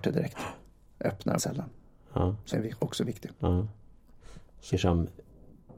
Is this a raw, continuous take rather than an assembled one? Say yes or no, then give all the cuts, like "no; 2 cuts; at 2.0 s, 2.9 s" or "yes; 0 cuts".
no; 3 cuts; at 1.4 s, 2.5 s, 4.7 s